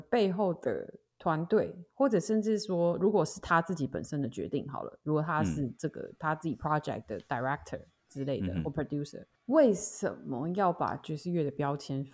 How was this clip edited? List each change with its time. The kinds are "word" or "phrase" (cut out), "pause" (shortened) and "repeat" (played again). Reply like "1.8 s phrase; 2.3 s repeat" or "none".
9.4 s pause